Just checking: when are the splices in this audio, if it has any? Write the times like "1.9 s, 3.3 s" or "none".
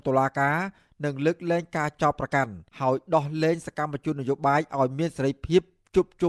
2.7 s